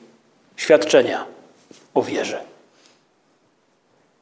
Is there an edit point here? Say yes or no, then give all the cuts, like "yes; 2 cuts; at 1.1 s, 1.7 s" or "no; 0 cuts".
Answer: no; 0 cuts